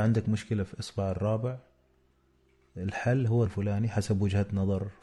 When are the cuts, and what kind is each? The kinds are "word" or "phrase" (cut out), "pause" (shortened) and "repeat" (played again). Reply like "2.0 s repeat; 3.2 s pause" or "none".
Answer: 3.5 s word